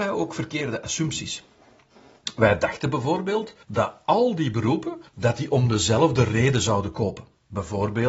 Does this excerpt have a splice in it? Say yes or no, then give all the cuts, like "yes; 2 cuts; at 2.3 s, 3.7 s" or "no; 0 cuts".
yes; 2 cuts; at 3.6 s, 5.1 s